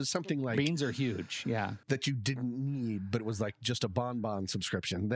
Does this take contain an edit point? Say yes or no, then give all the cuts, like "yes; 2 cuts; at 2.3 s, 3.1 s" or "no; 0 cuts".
yes; 1 cut; at 1.8 s